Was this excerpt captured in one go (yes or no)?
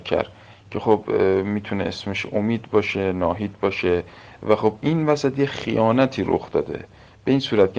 yes